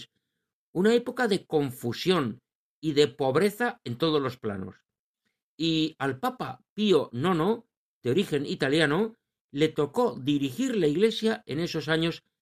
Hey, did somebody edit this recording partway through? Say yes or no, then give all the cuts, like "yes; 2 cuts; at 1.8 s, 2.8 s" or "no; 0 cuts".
no; 0 cuts